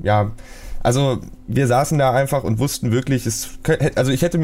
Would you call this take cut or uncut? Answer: uncut